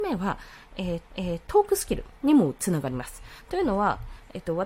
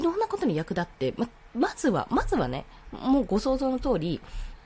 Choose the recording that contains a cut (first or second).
first